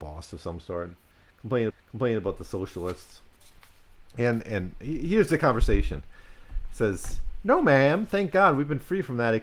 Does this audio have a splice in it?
yes; 2 cuts; at 1.7 s, 4.1 s

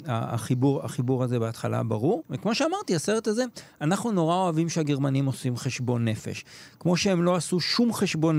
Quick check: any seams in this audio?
no; 0 cuts

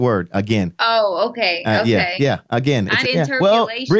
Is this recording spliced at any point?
yes; 1 cut; at 3.0 s

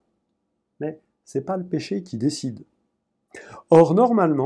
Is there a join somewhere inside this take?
no; 0 cuts

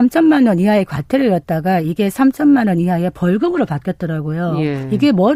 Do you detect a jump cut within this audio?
no; 0 cuts

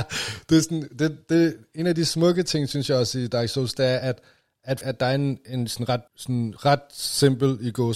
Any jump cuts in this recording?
yes; 2 cuts; at 4.8 s, 6.1 s

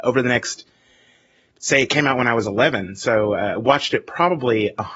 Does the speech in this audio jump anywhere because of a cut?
no; 0 cuts

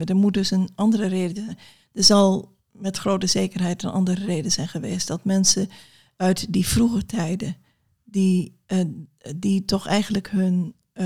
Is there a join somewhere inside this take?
no; 0 cuts

